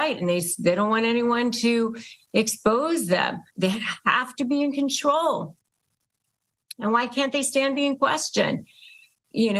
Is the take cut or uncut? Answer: cut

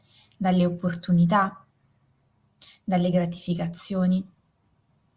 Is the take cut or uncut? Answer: uncut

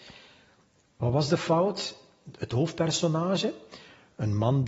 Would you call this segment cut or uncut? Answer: uncut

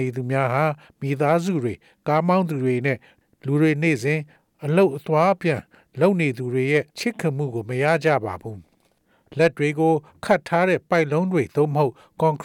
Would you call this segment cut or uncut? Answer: cut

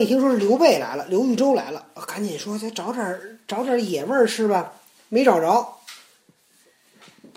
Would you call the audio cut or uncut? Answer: uncut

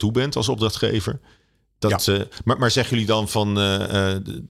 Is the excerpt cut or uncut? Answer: uncut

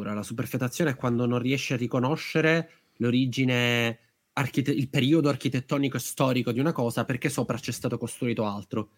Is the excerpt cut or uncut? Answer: uncut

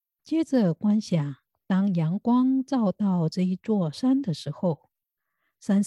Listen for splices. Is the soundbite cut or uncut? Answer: uncut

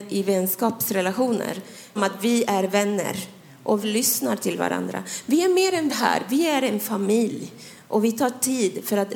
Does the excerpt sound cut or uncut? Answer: cut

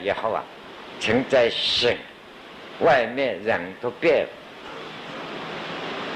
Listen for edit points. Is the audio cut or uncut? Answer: uncut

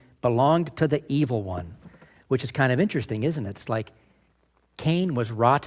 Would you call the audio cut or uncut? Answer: uncut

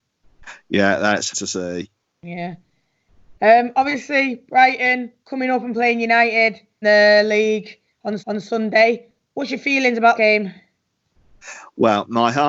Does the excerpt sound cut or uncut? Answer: cut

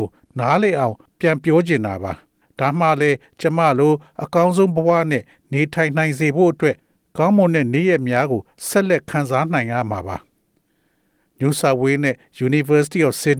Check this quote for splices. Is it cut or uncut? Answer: uncut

